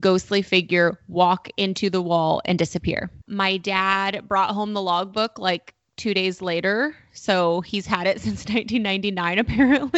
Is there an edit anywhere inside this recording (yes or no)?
yes